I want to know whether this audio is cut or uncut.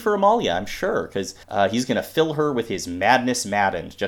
cut